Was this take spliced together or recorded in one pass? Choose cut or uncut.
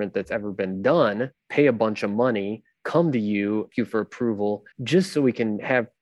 cut